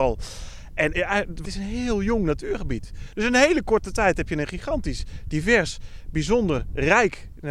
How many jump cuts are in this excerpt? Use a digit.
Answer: 2